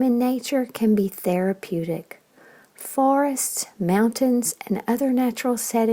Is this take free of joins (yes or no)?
yes